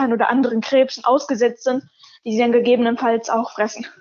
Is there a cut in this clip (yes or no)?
no